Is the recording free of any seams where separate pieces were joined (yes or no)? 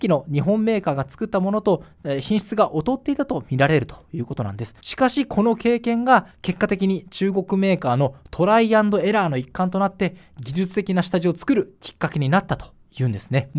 no